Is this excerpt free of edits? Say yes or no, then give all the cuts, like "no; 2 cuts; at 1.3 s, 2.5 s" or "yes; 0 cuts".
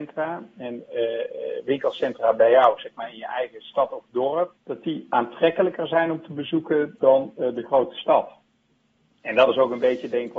no; 1 cut; at 4.6 s